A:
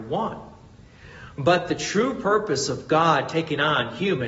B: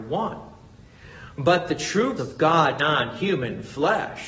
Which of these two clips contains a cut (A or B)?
B